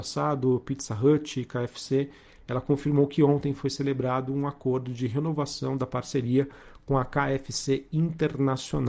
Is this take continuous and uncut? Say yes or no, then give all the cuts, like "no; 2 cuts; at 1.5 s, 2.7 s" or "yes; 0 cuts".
yes; 0 cuts